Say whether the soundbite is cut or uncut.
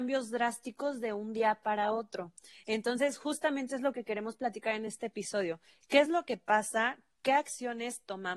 uncut